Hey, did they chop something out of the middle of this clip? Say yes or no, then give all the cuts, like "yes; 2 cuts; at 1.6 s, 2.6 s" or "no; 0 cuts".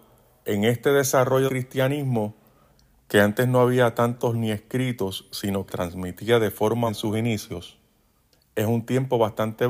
yes; 4 cuts; at 1.5 s, 4.3 s, 5.7 s, 6.9 s